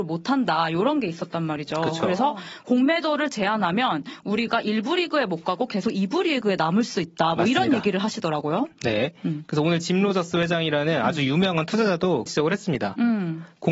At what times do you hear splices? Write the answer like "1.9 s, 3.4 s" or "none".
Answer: 12.3 s